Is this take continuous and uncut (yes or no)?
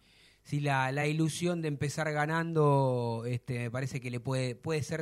yes